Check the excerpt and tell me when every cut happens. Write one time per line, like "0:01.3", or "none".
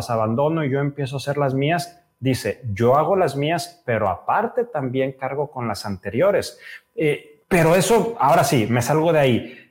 0:07.4